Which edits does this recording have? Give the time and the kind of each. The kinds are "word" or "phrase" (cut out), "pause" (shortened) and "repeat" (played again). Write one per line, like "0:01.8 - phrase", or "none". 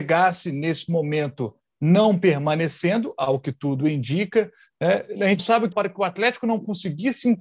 0:05.4 - word
0:05.7 - word

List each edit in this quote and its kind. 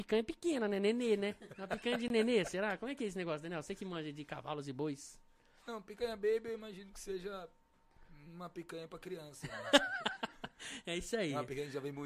none

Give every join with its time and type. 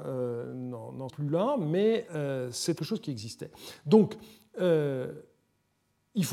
0:01.1 - word
0:02.1 - word
0:02.8 - word

